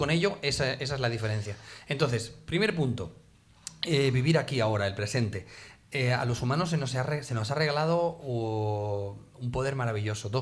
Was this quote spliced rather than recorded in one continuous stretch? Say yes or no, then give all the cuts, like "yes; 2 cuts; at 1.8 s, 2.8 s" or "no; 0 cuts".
no; 0 cuts